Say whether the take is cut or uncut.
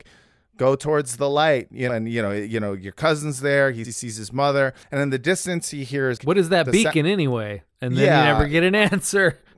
cut